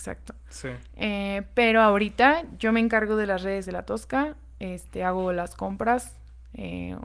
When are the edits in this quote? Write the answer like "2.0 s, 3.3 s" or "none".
3.6 s